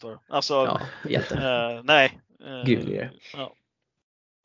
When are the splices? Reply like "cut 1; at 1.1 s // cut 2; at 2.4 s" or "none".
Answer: cut 1; at 3.2 s